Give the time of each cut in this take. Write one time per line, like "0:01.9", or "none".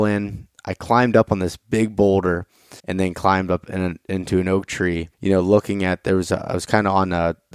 0:02.8
0:05.1